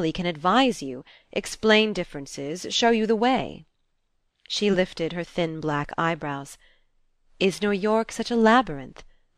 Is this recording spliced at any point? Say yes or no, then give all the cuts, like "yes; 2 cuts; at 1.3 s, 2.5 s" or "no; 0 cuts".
no; 0 cuts